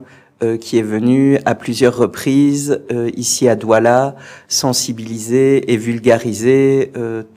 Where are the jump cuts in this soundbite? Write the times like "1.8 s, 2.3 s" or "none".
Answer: none